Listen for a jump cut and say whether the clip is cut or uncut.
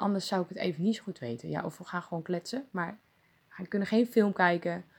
uncut